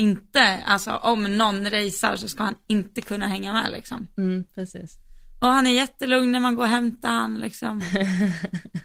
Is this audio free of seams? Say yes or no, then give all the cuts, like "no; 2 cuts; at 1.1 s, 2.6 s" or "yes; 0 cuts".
yes; 0 cuts